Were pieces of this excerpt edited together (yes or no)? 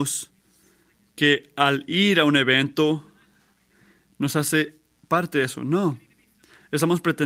no